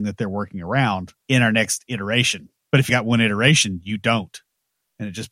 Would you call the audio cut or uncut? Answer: cut